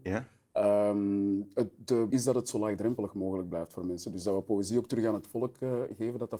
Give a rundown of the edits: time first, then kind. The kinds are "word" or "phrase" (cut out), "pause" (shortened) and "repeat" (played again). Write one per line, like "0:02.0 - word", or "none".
0:02.1 - word